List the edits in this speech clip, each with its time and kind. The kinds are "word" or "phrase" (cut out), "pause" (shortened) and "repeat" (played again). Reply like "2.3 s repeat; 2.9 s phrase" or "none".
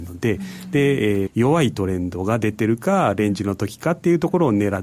1.3 s phrase